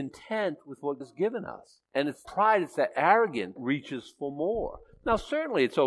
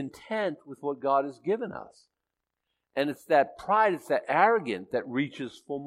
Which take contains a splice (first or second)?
first